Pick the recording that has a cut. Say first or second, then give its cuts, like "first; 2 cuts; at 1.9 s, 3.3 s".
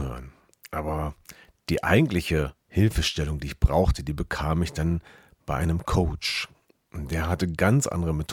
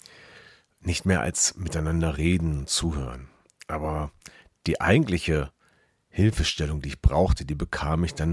first; 1 cut; at 2.6 s